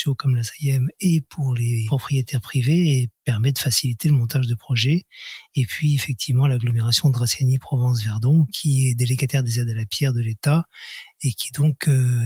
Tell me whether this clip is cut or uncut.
uncut